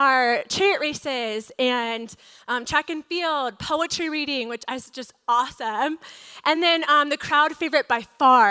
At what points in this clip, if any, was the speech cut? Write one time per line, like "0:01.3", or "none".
none